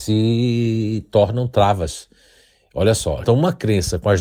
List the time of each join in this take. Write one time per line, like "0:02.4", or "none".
0:03.2